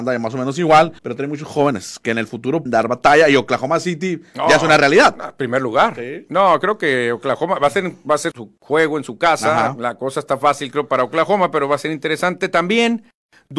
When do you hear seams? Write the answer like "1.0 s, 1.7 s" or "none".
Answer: 1.0 s, 2.7 s, 8.3 s

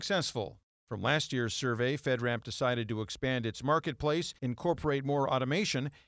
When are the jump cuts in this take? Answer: 4.4 s

